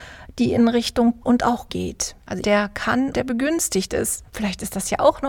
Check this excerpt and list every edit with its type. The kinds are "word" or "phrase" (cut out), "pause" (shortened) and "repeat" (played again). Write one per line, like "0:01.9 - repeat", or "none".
0:01.2 - word
0:01.7 - word
0:02.4 - word
0:03.1 - word